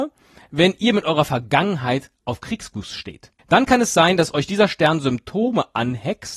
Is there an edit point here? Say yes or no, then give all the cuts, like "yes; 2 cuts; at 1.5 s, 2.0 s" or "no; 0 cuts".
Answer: yes; 1 cut; at 3.4 s